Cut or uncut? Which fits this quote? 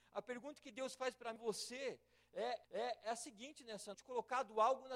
cut